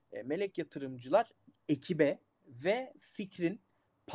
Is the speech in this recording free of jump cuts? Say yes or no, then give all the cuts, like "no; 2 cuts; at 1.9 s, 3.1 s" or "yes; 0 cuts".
yes; 0 cuts